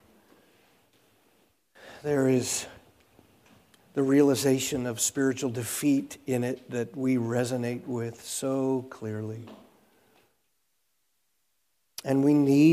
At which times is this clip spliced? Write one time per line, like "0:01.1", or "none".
none